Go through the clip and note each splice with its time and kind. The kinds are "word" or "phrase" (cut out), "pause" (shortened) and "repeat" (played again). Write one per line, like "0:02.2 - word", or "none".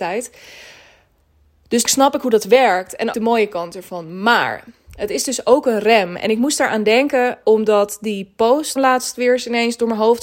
0:01.8 - word
0:03.1 - word
0:07.4 - word
0:08.8 - word